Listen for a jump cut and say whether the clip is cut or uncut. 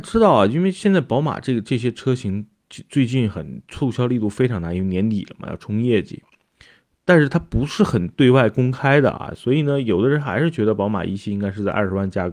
uncut